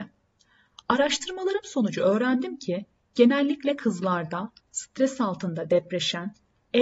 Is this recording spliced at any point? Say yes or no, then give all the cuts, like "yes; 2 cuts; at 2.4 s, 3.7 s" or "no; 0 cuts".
no; 0 cuts